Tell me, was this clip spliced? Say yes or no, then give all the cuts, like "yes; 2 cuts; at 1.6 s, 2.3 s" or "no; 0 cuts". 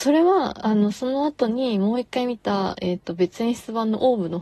no; 0 cuts